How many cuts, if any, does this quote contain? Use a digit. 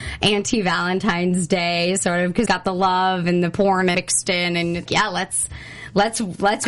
3